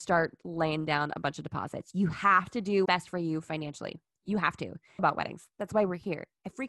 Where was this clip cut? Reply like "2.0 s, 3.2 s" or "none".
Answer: 2.8 s, 5.0 s